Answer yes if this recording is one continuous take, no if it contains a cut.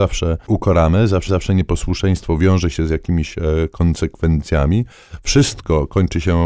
no